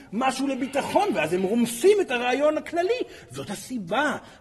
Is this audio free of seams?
yes; 0 cuts

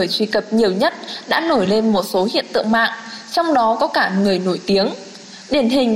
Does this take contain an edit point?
no; 0 cuts

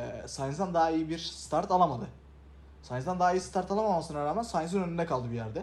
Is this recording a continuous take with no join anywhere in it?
yes; 0 cuts

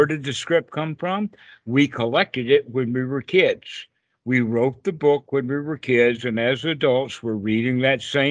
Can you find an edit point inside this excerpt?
no; 0 cuts

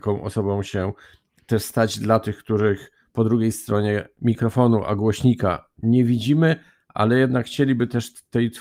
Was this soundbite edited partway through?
no; 0 cuts

